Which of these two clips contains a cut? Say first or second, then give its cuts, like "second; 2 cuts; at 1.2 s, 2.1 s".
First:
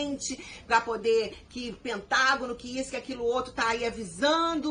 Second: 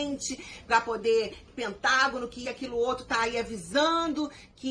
second; 2 cuts; at 1.5 s, 2.4 s